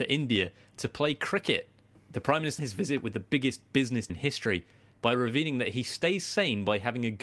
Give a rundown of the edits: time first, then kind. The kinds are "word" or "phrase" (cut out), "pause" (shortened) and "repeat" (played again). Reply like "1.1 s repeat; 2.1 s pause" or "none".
2.6 s word; 4.1 s word